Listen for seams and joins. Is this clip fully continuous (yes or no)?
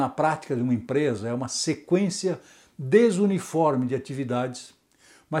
yes